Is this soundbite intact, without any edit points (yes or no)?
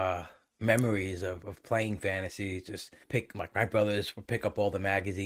no